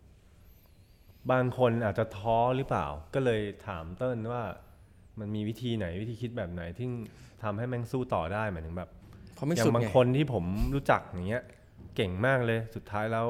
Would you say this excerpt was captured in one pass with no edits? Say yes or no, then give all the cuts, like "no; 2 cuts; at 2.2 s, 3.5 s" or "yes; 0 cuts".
yes; 0 cuts